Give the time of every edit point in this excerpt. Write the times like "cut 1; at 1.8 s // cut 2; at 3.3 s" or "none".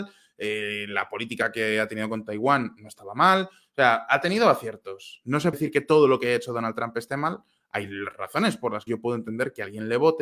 cut 1; at 5.5 s // cut 2; at 8.9 s